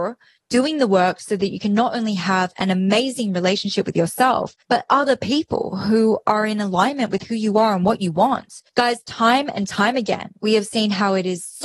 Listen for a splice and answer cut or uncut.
cut